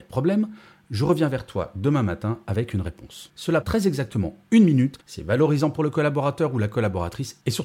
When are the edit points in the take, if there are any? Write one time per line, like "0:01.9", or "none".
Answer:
0:03.6
0:05.0